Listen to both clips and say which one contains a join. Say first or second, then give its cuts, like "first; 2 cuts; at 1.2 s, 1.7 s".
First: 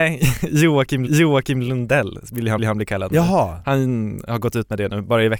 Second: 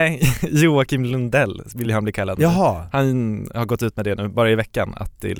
first; 2 cuts; at 1.1 s, 2.6 s